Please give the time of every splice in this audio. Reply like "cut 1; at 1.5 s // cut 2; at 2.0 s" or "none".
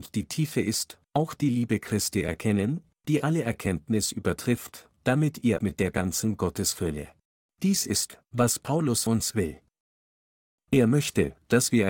cut 1; at 5.6 s // cut 2; at 7.3 s // cut 3; at 9.1 s